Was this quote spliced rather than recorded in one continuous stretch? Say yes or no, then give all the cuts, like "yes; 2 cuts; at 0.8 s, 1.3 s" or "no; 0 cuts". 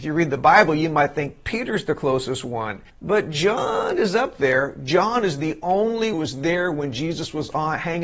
yes; 2 cuts; at 2.9 s, 6.1 s